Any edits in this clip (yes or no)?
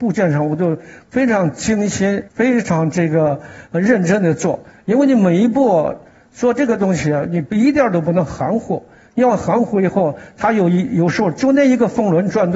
yes